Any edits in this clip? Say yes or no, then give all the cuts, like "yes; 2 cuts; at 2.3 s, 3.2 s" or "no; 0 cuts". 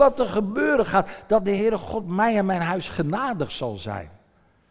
no; 0 cuts